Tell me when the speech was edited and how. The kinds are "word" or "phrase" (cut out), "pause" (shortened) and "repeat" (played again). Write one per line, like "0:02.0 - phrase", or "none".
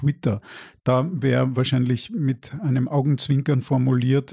none